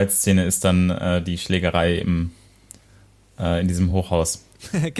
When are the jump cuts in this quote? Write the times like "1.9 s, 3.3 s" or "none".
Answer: none